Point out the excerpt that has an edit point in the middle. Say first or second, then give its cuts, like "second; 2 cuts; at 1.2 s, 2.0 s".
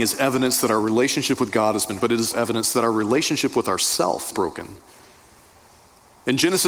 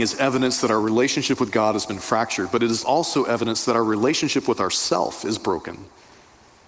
first; 3 cuts; at 2.0 s, 2.3 s, 4.3 s